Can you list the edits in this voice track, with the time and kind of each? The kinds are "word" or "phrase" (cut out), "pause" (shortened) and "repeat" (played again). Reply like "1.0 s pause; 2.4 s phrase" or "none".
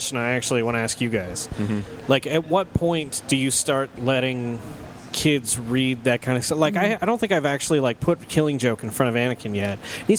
none